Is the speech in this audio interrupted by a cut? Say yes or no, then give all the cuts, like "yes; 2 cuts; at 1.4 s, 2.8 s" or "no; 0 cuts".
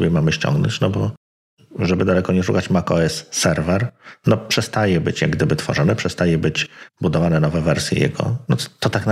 no; 0 cuts